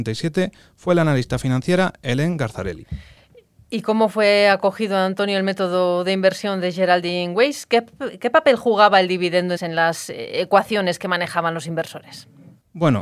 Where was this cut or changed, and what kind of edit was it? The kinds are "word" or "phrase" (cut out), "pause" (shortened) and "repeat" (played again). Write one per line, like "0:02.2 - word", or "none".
0:09.6 - word